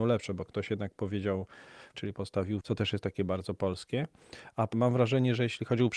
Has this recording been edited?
yes; 3 cuts; at 1.9 s, 2.6 s, 4.7 s

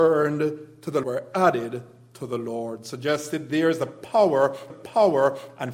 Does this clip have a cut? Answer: yes; 2 cuts; at 1.0 s, 4.7 s

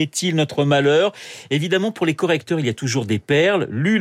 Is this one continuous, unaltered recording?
yes; 0 cuts

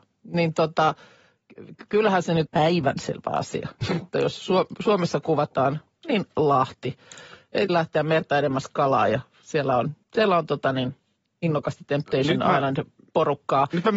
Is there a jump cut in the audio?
yes; 4 cuts; at 2.5 s, 7.7 s, 10.0 s, 11.2 s

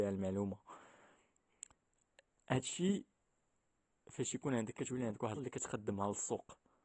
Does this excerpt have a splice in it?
yes; 2 cuts; at 4.7 s, 5.4 s

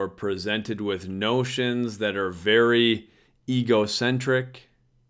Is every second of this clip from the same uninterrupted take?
yes; 0 cuts

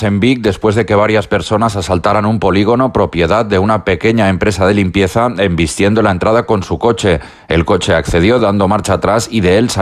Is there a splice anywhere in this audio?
no; 0 cuts

